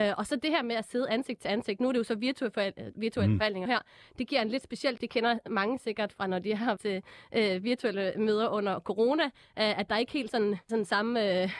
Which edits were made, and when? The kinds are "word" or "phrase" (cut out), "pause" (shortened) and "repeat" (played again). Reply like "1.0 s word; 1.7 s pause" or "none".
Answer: 3.7 s word; 5.0 s word; 6.8 s word; 10.3 s word; 10.7 s word